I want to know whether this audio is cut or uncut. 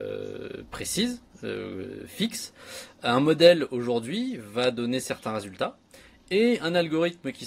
uncut